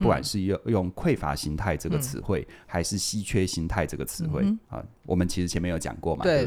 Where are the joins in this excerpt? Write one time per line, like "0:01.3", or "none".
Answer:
0:04.6